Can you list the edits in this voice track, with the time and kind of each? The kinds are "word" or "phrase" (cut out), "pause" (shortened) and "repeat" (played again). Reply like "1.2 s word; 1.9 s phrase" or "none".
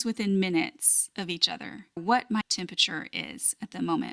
2.0 s phrase; 2.4 s word